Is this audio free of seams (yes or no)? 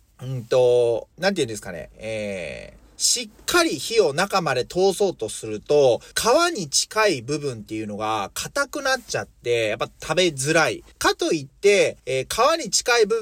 no